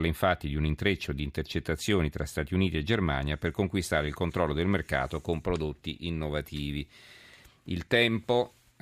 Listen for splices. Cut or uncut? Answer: uncut